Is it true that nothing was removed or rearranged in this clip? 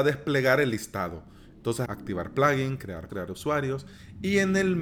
no; 2 cuts; at 1.9 s, 3.1 s

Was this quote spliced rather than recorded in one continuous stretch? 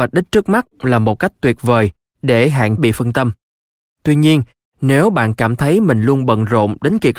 yes; 1 cut; at 2.8 s

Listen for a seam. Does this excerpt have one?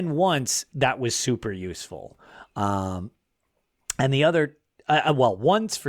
no; 0 cuts

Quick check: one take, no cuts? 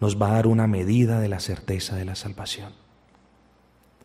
yes; 0 cuts

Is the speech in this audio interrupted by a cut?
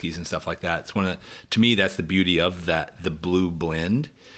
no; 0 cuts

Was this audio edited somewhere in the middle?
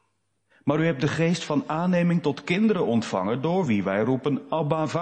no; 0 cuts

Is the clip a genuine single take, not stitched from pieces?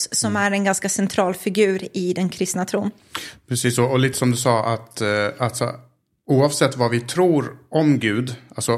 yes; 0 cuts

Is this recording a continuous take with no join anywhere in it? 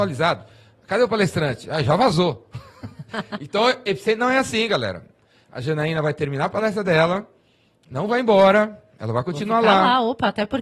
yes; 0 cuts

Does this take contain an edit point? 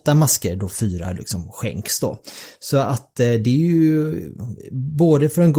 no; 0 cuts

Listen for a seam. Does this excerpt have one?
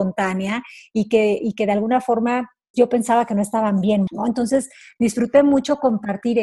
yes; 2 cuts; at 2.7 s, 4.1 s

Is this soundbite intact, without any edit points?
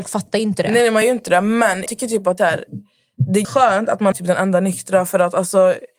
no; 5 cuts; at 1.0 s, 1.9 s, 2.4 s, 3.4 s, 4.1 s

